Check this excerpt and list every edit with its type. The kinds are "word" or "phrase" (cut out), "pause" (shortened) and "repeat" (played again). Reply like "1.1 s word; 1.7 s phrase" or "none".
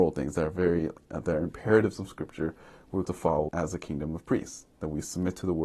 3.0 s word; 3.5 s word